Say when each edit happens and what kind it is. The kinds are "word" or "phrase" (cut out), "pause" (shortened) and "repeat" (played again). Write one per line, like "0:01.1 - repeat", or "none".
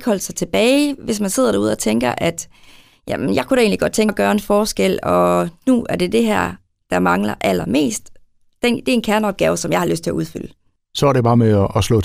0:04.1 - word